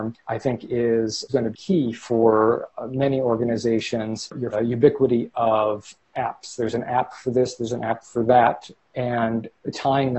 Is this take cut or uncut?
cut